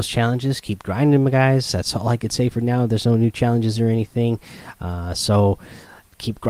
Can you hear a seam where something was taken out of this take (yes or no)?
no